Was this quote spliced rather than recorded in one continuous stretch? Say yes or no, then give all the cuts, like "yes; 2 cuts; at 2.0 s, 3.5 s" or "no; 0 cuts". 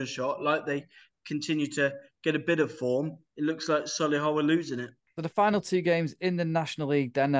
no; 0 cuts